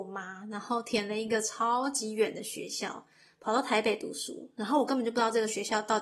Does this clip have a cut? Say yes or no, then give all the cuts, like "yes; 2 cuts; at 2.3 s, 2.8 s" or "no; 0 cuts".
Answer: no; 0 cuts